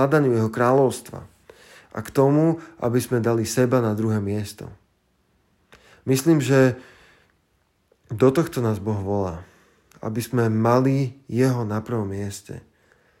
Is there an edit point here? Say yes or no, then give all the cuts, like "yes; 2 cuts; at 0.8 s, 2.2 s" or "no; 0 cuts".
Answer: no; 0 cuts